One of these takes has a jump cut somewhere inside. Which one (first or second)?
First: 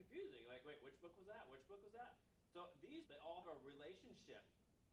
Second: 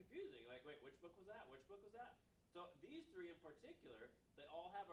first